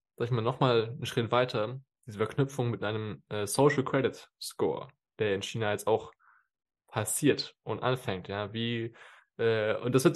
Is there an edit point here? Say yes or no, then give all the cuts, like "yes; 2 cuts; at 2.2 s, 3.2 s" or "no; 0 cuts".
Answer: no; 0 cuts